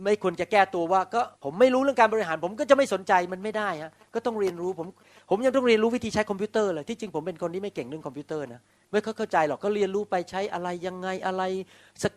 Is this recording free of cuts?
no; 1 cut; at 1.4 s

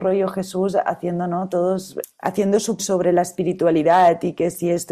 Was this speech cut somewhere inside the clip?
yes; 2 cuts; at 2.0 s, 2.8 s

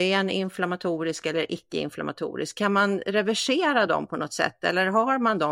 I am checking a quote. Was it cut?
no; 0 cuts

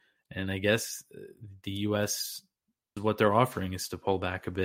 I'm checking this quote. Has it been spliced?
yes; 1 cut; at 3.0 s

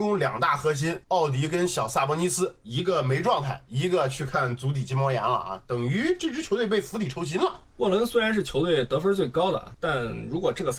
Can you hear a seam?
yes; 1 cut; at 1.0 s

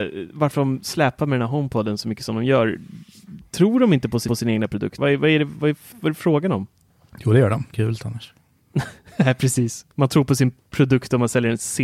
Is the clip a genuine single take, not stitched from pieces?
no; 5 cuts; at 4.3 s, 5.0 s, 5.9 s, 7.7 s, 9.9 s

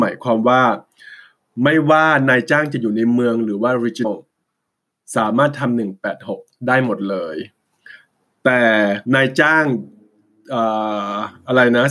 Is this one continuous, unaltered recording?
no; 2 cuts; at 4.0 s, 9.0 s

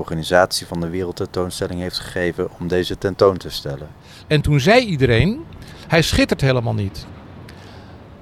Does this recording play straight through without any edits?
yes; 0 cuts

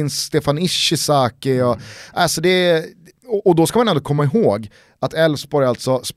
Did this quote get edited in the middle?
no; 0 cuts

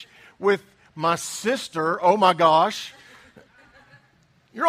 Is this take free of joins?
yes; 0 cuts

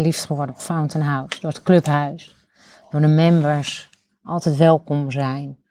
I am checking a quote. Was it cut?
no; 0 cuts

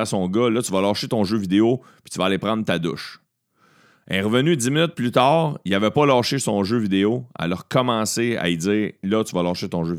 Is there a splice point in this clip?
no; 0 cuts

